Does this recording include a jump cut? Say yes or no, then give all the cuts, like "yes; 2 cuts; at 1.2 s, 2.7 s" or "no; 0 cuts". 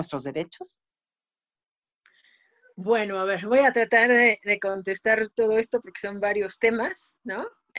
no; 0 cuts